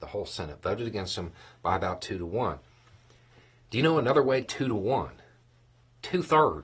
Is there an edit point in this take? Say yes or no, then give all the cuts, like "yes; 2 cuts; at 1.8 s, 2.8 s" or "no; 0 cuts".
yes; 1 cut; at 4.4 s